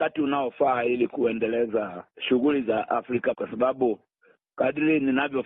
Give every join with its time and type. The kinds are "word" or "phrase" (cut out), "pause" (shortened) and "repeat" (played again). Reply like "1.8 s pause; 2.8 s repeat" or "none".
2.1 s pause; 3.3 s word